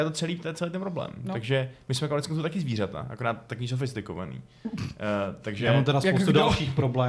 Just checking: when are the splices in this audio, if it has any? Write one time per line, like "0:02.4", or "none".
none